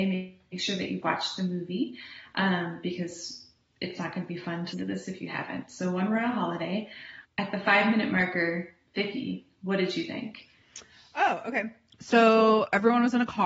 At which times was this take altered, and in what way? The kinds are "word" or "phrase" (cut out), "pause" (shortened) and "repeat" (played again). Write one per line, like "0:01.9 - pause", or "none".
0:04.7 - word
0:07.2 - word

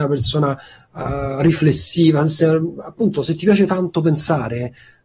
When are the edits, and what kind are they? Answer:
none

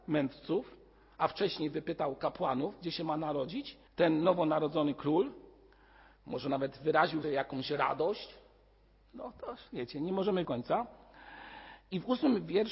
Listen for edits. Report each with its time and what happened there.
0:03.9 - pause
0:07.2 - phrase
0:09.7 - pause
0:10.4 - phrase

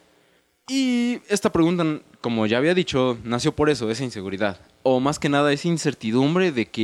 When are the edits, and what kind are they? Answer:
none

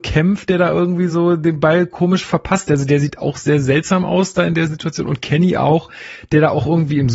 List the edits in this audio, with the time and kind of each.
none

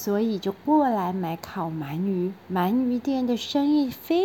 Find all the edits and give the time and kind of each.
0:02.4 - pause

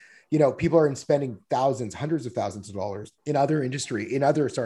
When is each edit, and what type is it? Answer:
0:03.2 - pause

